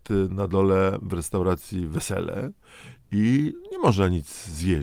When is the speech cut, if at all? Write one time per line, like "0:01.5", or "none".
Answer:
none